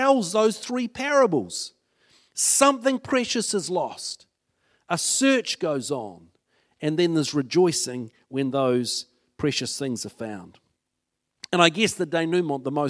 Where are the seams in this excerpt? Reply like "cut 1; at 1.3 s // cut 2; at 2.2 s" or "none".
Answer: none